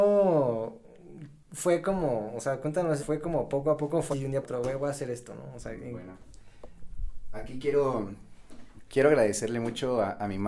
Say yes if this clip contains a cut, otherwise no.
yes